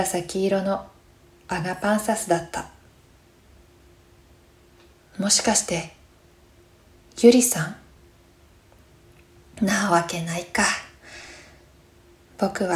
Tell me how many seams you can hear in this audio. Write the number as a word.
zero